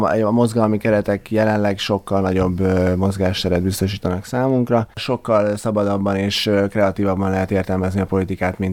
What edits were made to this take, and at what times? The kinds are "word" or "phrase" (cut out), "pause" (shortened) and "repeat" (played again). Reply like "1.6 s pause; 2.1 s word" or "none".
none